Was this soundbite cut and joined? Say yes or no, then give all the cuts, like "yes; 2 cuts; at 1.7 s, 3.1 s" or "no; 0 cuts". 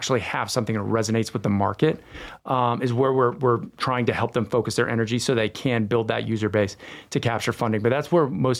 no; 0 cuts